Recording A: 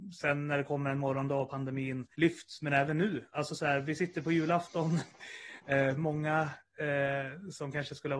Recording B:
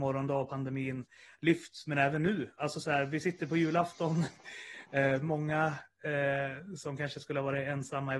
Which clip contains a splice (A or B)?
A